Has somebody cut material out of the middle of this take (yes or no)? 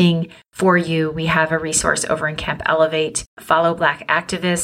yes